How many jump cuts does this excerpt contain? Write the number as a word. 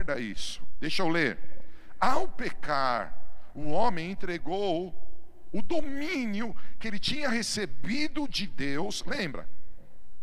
zero